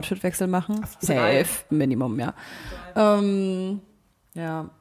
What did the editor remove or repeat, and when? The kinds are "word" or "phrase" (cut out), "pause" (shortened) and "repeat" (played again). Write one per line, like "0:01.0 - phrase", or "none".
0:01.1 - word
0:01.7 - word